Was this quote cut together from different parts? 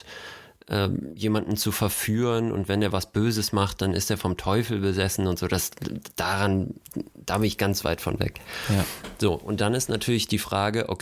no; 0 cuts

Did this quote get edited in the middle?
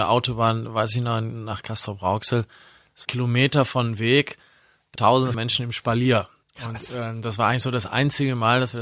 yes; 4 cuts; at 3.0 s, 5.0 s, 5.3 s, 6.4 s

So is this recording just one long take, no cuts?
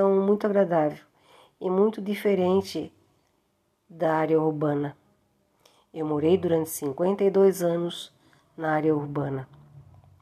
yes; 0 cuts

